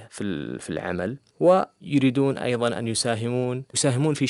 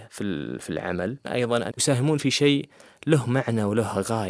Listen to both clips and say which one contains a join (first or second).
second